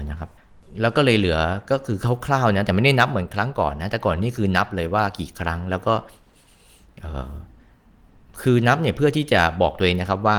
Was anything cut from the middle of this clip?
no; 0 cuts

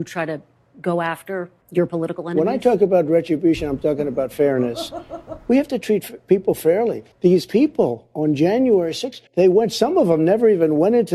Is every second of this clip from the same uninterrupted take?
no; 3 cuts; at 1.6 s, 7.1 s, 9.3 s

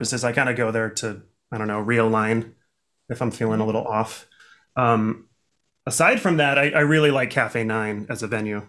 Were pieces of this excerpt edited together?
no; 0 cuts

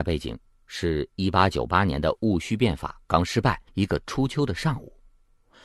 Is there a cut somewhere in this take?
yes; 1 cut; at 3.7 s

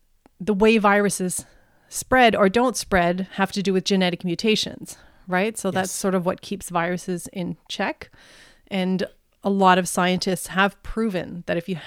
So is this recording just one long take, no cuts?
yes; 0 cuts

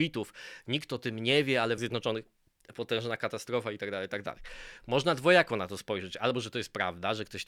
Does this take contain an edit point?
yes; 1 cut; at 1.8 s

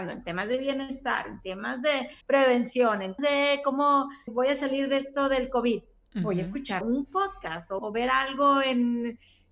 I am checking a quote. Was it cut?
yes; 5 cuts; at 2.2 s, 3.2 s, 4.3 s, 6.8 s, 7.8 s

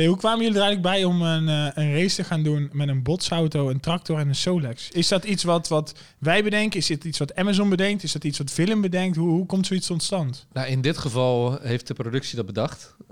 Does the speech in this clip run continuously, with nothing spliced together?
yes; 0 cuts

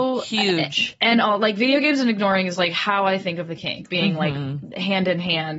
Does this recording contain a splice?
yes; 1 cut; at 3.9 s

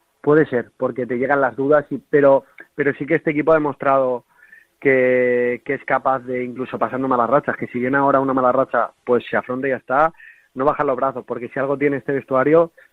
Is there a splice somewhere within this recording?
no; 0 cuts

